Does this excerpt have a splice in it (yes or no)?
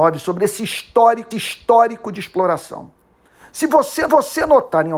yes